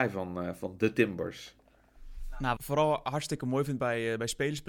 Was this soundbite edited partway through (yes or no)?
yes